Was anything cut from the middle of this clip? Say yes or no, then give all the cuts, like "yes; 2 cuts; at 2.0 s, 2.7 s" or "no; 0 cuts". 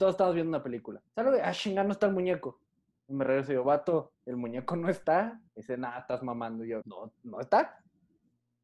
yes; 4 cuts; at 1.1 s, 4.1 s, 5.5 s, 6.8 s